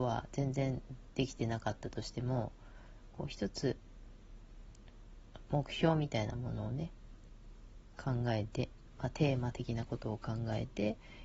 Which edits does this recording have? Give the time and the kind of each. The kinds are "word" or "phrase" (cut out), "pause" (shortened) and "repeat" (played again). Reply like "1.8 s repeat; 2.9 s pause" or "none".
none